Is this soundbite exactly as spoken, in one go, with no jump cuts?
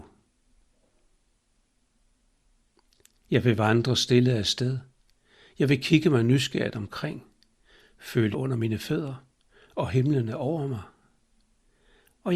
no; 1 cut; at 8.3 s

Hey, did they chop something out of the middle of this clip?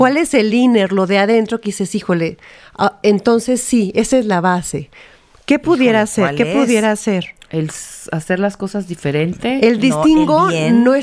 no; 0 cuts

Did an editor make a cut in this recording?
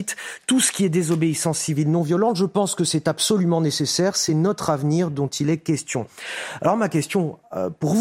no; 0 cuts

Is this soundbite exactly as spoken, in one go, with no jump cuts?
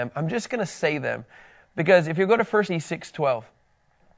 no; 1 cut; at 2.7 s

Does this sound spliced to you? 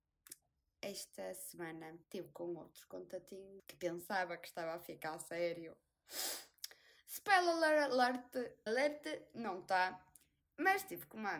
yes; 3 cuts; at 2.0 s, 3.6 s, 8.7 s

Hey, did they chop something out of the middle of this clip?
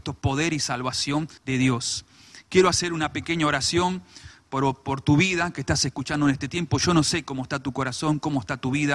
yes; 1 cut; at 1.4 s

